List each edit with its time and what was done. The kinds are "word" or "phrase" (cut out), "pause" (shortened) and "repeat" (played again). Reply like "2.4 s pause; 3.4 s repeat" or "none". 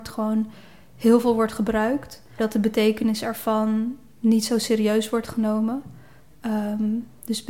2.4 s word